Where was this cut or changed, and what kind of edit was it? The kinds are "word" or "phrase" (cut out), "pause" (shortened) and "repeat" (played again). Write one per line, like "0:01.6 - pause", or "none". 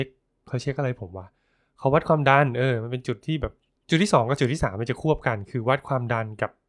0:03.8 - pause